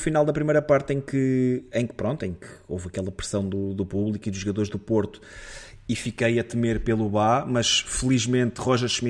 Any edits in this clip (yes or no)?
no